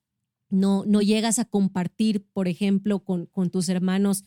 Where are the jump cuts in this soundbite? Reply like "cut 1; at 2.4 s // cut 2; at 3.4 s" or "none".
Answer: none